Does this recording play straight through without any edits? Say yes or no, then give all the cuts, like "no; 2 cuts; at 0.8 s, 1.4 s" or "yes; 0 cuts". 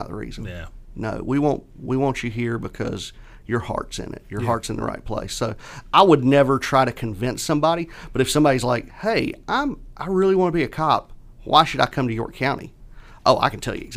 yes; 0 cuts